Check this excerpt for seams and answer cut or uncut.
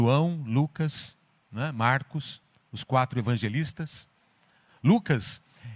uncut